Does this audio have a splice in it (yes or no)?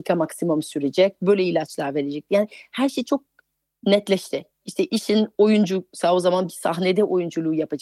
no